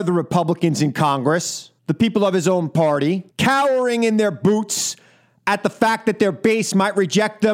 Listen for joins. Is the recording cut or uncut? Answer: cut